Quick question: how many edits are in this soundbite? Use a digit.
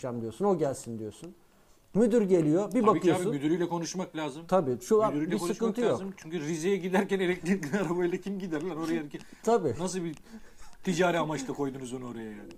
0